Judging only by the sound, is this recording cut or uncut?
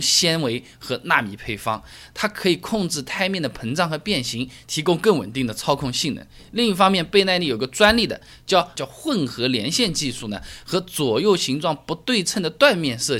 cut